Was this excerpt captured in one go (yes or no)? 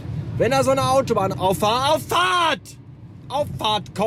no